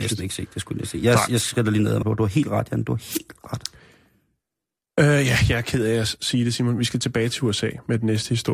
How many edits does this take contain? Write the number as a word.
one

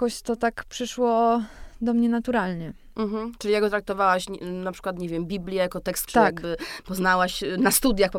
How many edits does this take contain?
one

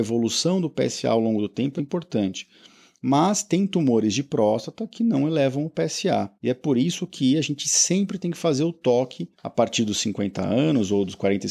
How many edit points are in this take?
three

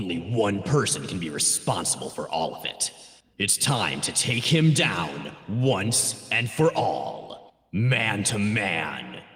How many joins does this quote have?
two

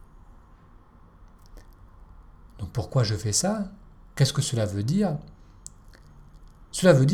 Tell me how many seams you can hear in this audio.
zero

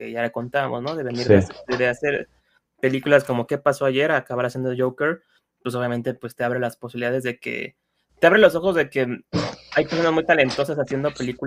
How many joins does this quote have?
zero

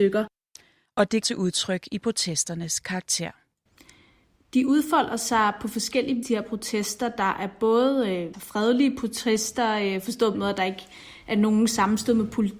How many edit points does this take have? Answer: four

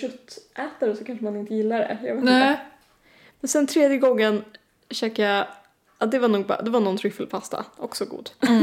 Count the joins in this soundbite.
zero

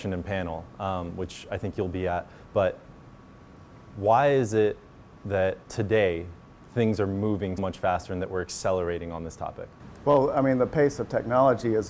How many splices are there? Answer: two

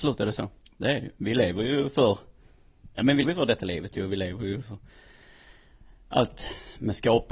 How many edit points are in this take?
one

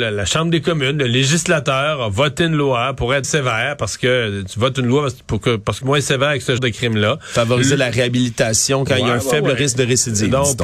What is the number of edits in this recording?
three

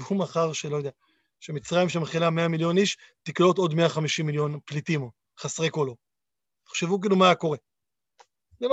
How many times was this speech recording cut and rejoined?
zero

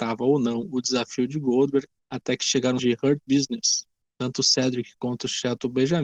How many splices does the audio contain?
one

